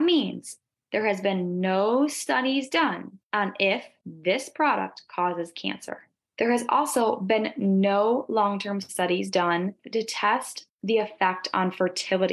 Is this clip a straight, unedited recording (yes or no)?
yes